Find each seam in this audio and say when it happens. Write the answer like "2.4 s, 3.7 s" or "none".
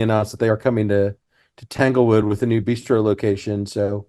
none